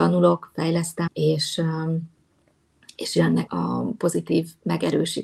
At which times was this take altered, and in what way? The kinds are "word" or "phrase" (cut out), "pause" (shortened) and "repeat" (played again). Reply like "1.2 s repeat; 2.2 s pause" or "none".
1.1 s word; 3.5 s word